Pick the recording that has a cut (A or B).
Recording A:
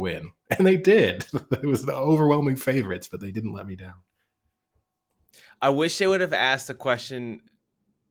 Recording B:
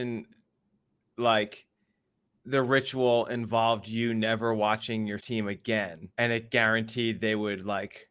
B